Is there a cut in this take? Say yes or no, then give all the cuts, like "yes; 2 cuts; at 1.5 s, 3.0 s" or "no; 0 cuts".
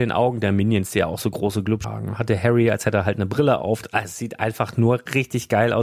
yes; 1 cut; at 1.8 s